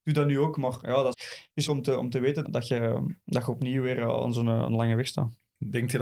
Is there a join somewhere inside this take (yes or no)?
yes